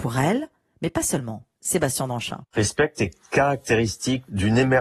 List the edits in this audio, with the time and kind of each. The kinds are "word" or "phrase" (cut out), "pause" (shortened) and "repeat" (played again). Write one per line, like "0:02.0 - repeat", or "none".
0:01.6 - pause